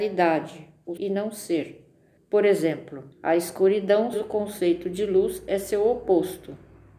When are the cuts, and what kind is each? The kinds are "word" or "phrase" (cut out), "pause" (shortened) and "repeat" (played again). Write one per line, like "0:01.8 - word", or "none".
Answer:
0:01.0 - word
0:02.2 - pause
0:03.1 - pause
0:04.1 - phrase